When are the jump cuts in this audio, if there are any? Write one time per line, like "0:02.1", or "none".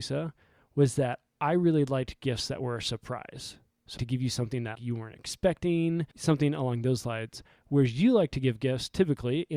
0:04.0
0:04.7
0:06.1

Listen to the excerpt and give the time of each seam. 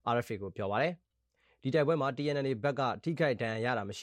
none

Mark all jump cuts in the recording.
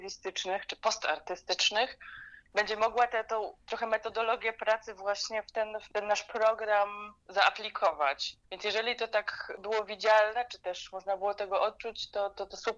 0:08.4

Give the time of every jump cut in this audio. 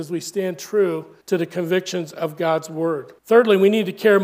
0:01.2
0:03.2

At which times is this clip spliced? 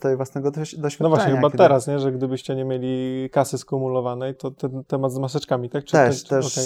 0:04.4

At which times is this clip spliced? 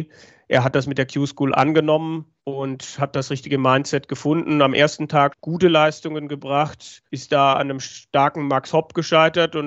0:02.4
0:05.3
0:07.1

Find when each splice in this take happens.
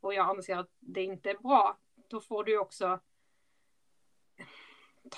none

